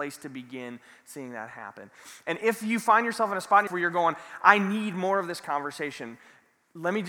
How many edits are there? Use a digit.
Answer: 1